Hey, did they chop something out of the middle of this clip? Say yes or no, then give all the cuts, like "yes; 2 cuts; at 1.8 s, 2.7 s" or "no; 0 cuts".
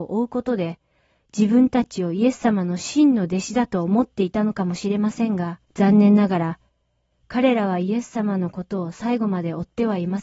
yes; 1 cut; at 5.7 s